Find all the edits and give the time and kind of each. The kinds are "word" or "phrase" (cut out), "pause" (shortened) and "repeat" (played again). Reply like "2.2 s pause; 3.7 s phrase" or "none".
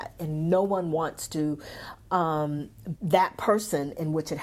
3.0 s word